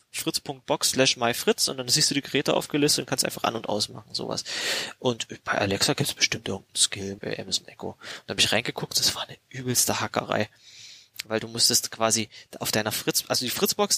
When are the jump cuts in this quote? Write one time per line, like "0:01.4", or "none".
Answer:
0:07.2